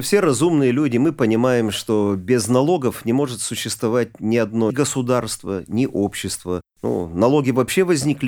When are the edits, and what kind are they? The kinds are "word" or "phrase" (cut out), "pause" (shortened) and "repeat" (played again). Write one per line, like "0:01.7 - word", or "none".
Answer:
0:04.7 - word